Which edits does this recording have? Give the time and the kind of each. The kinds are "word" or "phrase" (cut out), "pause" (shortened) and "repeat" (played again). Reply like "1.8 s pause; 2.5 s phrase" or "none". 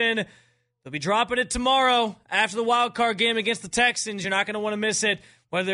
none